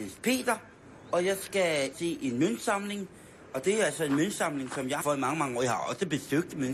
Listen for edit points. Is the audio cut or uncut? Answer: cut